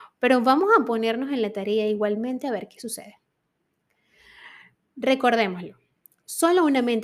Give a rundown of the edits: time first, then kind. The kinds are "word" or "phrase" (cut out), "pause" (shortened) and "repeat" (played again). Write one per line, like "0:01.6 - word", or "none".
none